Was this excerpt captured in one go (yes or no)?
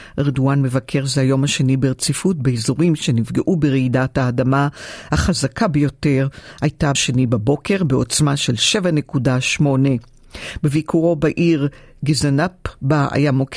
no